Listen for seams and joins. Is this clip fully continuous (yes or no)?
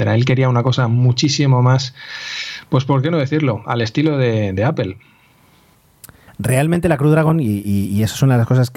no